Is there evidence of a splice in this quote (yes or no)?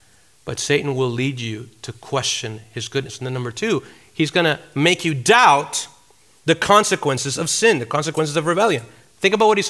no